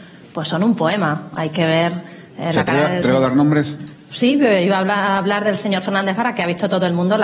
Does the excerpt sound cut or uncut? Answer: cut